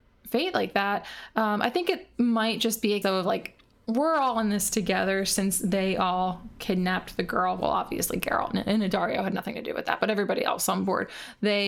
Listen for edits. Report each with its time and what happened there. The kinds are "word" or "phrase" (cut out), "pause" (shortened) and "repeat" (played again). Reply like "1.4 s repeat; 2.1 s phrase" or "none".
3.0 s word